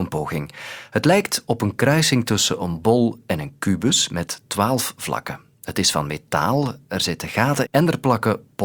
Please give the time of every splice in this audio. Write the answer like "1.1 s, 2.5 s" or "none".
7.6 s